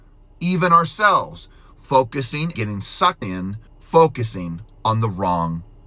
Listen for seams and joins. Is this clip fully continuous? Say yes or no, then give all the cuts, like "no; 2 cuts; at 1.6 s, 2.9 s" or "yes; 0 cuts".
no; 3 cuts; at 2.5 s, 3.2 s, 3.7 s